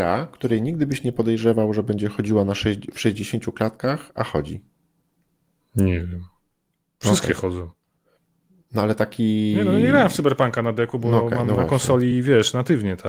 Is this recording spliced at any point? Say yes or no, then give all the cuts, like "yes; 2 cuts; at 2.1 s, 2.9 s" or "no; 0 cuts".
no; 0 cuts